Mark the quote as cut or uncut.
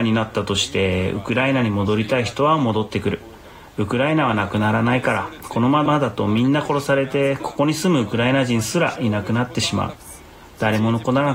uncut